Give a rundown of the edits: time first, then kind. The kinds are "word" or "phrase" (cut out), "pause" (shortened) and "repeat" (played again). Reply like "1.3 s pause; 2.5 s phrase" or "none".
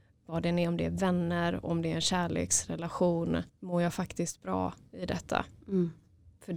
3.5 s pause